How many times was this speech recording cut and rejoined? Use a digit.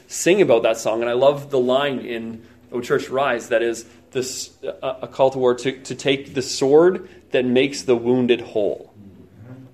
0